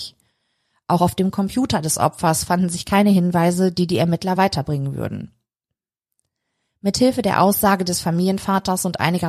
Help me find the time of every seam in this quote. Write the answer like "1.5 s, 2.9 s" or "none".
none